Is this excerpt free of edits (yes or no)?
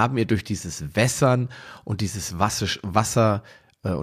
yes